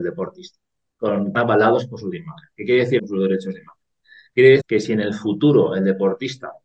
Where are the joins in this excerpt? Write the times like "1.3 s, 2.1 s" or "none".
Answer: 1.3 s, 2.1 s, 3.0 s, 4.6 s